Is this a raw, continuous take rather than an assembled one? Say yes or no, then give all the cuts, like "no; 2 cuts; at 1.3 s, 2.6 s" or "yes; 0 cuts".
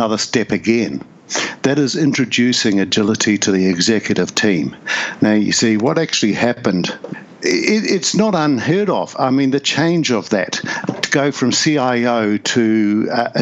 yes; 0 cuts